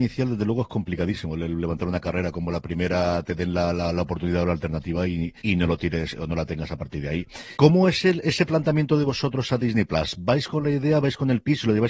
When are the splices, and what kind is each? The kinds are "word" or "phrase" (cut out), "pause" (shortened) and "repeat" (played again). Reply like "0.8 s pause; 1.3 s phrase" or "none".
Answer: 5.4 s pause; 7.5 s pause